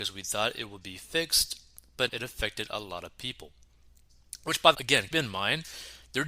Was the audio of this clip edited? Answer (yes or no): yes